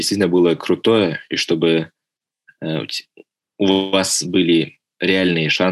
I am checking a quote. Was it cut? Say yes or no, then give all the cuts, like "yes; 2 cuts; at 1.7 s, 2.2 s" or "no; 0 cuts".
no; 0 cuts